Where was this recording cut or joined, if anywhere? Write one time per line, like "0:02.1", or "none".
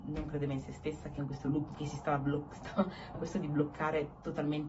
0:01.2
0:01.7
0:03.1